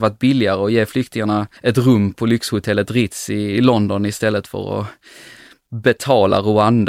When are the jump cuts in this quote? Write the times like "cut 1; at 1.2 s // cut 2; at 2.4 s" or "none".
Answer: cut 1; at 1.6 s // cut 2; at 2.1 s